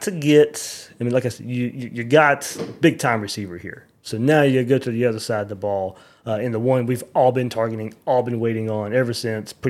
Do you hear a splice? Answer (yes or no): no